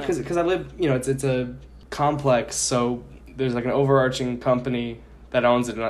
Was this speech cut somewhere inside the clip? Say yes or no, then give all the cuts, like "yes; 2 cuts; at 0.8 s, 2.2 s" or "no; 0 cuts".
no; 0 cuts